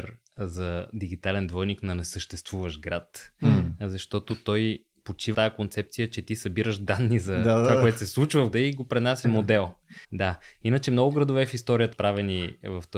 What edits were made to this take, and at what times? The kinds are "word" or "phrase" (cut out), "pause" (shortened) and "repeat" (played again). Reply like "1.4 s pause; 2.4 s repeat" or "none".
5.3 s word; 8.5 s word; 9.2 s phrase; 10.0 s pause; 11.9 s word